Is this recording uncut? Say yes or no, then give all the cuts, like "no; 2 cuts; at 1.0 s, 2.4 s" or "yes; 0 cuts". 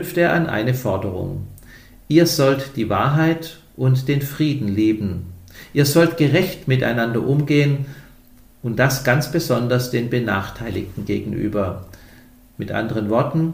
yes; 0 cuts